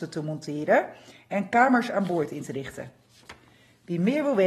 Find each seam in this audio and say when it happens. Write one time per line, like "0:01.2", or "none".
none